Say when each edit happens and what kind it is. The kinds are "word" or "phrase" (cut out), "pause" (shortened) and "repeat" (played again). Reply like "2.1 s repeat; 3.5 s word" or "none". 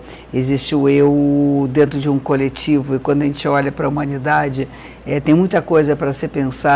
none